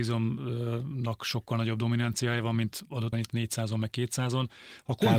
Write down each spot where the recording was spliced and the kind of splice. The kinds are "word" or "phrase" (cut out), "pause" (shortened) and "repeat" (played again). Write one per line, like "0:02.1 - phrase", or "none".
0:03.1 - word